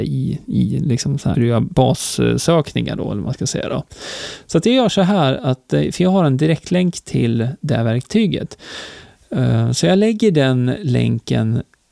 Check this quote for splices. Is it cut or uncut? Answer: cut